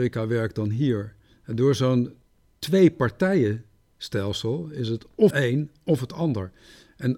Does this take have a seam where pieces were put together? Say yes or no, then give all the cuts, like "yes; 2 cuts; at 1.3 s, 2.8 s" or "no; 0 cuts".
yes; 1 cut; at 5.3 s